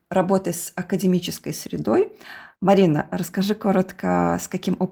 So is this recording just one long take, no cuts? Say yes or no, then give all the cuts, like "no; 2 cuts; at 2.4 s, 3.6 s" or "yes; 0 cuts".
no; 1 cut; at 2.5 s